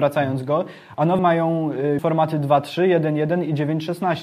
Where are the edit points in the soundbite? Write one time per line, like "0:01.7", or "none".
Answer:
0:01.2
0:02.0